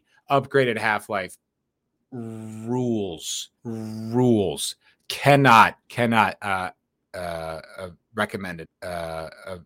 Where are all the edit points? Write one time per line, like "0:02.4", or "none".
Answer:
0:03.6
0:05.8
0:08.6

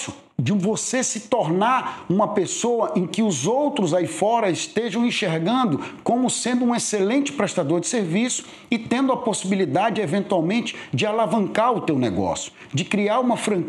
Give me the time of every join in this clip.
none

